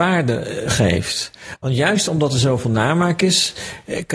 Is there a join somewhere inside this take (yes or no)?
no